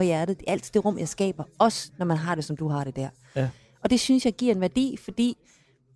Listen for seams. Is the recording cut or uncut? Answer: uncut